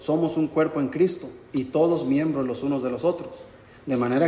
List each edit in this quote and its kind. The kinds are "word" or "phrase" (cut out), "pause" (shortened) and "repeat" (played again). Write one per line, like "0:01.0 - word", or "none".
none

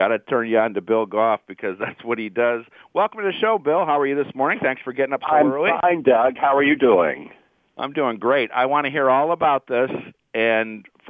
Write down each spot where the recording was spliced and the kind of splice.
none

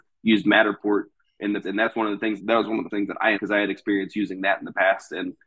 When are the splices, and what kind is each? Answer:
0:01.6 - word
0:02.4 - word
0:02.9 - word
0:03.3 - word

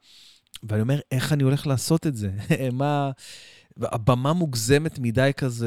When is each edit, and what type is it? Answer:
none

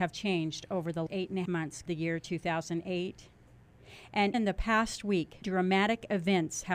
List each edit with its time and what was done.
0:01.1 - word
0:01.4 - word
0:01.9 - word
0:04.3 - word
0:05.4 - word

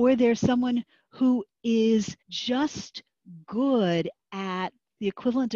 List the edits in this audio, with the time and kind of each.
0:02.2 - pause

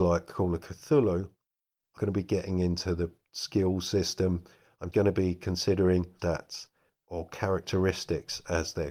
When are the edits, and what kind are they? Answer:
0:02.0 - word
0:04.9 - word
0:06.2 - word

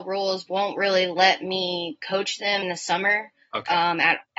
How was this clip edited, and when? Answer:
0:02.6 - word

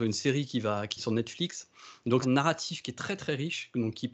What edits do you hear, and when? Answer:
0:01.0 - phrase
0:02.2 - phrase

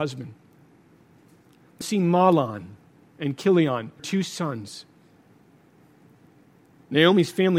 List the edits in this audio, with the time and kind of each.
0:01.8 - word
0:04.0 - word

